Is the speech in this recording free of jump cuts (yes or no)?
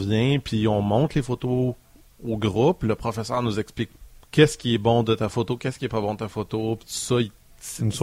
yes